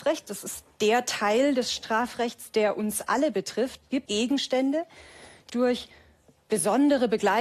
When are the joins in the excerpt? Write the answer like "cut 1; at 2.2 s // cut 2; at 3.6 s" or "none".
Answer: cut 1; at 4.1 s // cut 2; at 5.5 s